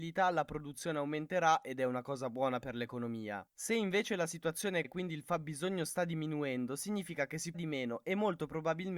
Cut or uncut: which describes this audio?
cut